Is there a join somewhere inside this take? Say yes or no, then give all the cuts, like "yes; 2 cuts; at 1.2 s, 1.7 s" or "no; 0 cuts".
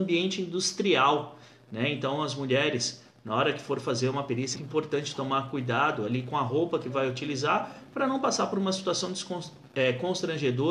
yes; 1 cut; at 4.5 s